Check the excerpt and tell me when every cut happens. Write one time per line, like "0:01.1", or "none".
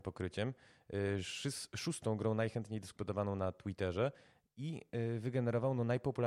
none